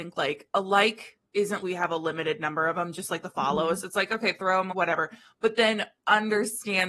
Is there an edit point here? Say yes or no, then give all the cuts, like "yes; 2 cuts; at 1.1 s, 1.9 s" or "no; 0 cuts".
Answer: yes; 2 cuts; at 1.6 s, 4.7 s